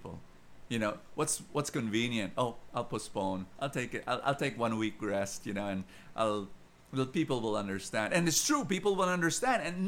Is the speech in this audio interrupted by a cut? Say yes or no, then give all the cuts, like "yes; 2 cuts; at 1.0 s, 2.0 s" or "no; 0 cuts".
no; 0 cuts